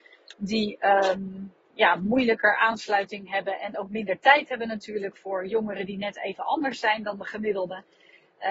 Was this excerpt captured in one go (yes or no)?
yes